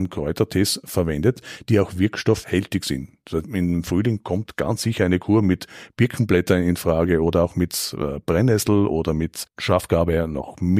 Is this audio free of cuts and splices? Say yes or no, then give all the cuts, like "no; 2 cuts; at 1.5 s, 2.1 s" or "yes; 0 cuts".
yes; 0 cuts